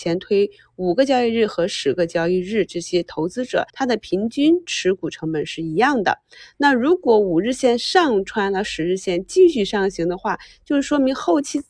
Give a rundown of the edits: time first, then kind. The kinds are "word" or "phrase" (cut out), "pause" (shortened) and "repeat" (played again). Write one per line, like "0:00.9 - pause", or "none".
0:03.7 - pause